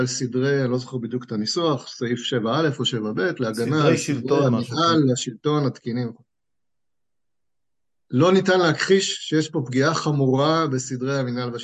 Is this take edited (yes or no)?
no